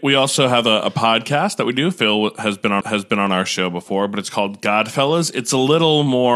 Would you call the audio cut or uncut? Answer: cut